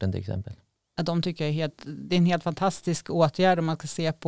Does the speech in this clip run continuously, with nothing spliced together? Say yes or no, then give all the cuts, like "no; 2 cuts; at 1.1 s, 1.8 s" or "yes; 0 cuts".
yes; 0 cuts